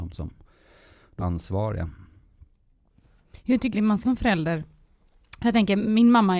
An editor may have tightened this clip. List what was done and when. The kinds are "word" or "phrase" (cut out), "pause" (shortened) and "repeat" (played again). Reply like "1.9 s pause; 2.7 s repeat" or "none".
1.2 s word; 3.7 s word; 4.0 s word